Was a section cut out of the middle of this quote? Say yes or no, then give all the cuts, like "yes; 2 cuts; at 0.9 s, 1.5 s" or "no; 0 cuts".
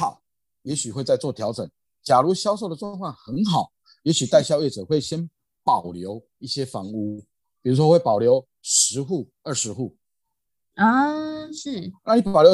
no; 0 cuts